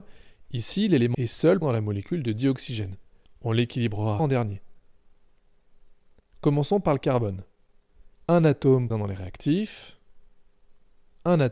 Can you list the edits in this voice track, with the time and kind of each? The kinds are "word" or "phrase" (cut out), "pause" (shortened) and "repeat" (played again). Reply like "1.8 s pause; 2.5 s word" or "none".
1.1 s word; 1.6 s word; 4.2 s word; 8.9 s word

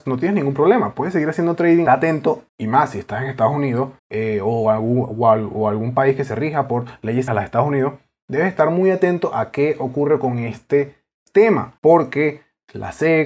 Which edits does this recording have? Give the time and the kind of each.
1.9 s phrase; 2.5 s pause; 4.0 s pause; 7.3 s word; 11.8 s pause

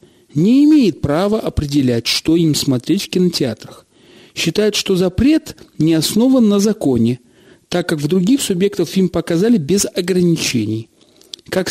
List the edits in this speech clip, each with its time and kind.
none

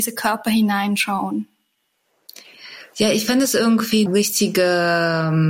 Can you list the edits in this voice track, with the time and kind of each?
4.1 s word

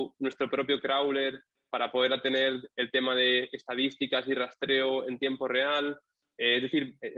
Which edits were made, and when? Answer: none

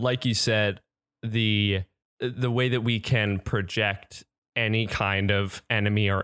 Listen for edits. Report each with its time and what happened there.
none

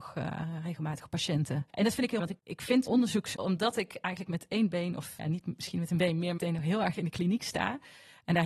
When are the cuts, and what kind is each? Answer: 1.7 s pause; 2.2 s word; 2.9 s word; 3.3 s word; 5.2 s word; 6.4 s phrase

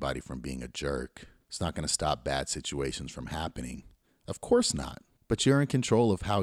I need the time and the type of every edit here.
none

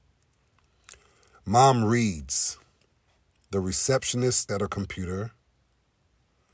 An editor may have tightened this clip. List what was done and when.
4.5 s word

